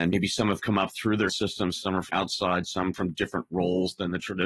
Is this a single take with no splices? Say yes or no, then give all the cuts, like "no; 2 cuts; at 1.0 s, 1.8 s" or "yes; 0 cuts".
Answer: no; 3 cuts; at 1.3 s, 2.1 s, 2.9 s